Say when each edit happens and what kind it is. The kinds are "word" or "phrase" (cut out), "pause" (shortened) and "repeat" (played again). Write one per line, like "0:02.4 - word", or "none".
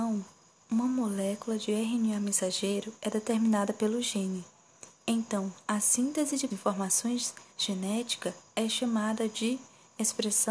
0:06.5 - phrase
0:07.5 - pause